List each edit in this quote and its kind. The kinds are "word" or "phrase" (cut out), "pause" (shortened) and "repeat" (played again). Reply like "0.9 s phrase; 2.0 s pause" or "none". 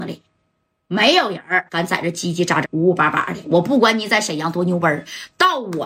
1.7 s pause; 2.6 s word